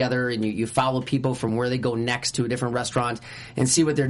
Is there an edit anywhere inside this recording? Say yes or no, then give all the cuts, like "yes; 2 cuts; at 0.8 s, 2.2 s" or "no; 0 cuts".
no; 0 cuts